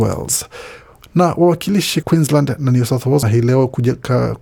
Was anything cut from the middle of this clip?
yes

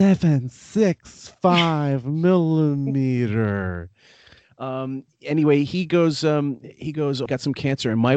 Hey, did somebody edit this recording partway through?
yes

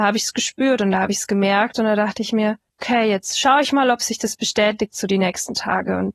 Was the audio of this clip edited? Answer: no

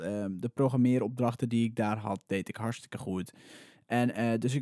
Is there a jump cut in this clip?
no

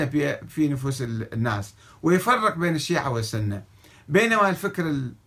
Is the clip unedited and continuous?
yes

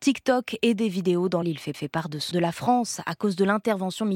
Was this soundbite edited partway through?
yes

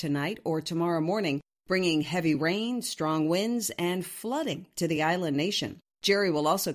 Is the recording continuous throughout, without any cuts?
yes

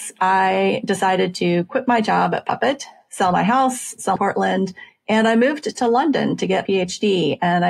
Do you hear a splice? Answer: yes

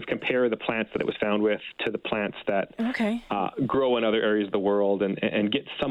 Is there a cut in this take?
no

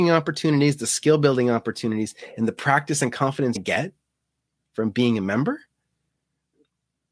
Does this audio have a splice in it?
yes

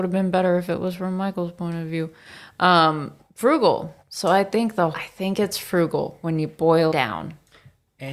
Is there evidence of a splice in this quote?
yes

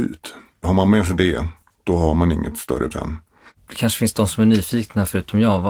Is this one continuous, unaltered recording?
no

